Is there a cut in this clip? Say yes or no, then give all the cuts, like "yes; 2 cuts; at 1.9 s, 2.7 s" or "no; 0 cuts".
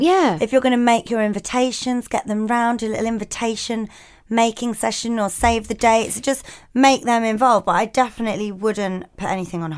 no; 0 cuts